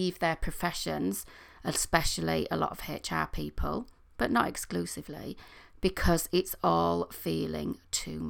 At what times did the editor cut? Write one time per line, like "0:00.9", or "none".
none